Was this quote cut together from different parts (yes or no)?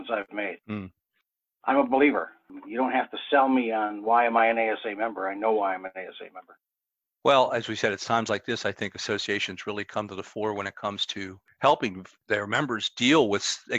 no